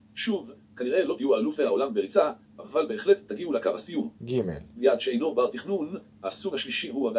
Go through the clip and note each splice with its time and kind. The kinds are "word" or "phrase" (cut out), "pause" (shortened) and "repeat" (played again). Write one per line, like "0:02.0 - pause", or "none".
0:04.2 - pause